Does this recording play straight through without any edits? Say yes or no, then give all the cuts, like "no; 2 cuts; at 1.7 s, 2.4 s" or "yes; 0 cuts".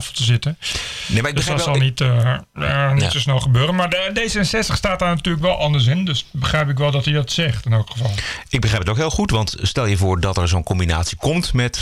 yes; 0 cuts